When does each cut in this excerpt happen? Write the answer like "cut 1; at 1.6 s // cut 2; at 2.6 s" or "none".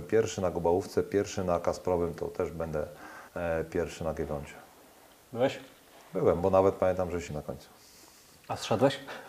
cut 1; at 3.3 s // cut 2; at 7.3 s